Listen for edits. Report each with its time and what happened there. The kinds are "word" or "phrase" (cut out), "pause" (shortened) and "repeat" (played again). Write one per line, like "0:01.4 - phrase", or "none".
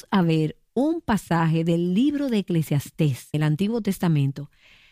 0:03.3 - word